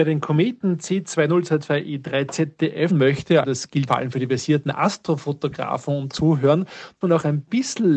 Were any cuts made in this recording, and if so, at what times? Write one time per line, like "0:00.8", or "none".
0:02.9
0:03.4
0:03.9
0:06.1
0:07.0